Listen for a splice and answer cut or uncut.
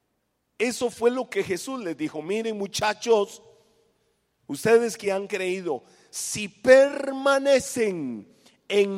uncut